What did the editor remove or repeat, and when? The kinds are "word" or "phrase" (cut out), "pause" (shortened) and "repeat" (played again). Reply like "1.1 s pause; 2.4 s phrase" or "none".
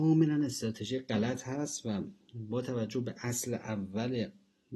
none